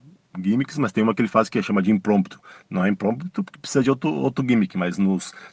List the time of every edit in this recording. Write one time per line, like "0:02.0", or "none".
none